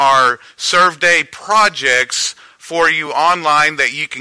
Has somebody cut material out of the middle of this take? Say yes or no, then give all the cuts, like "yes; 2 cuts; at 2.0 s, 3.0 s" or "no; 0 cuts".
no; 0 cuts